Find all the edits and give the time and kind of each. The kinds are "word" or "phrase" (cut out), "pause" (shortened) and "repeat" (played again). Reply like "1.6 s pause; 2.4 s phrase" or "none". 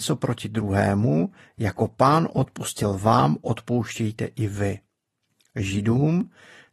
none